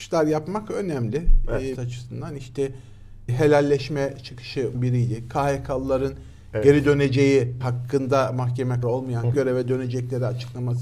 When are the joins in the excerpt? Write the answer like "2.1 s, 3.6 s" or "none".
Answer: 1.7 s, 3.3 s, 4.7 s, 7.6 s, 8.8 s, 9.3 s